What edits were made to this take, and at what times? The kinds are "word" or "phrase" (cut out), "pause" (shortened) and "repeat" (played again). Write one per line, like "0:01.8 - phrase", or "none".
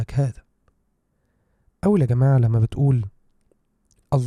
none